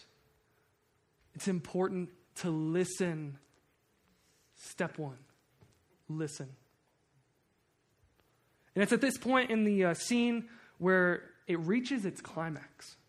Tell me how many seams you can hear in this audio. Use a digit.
0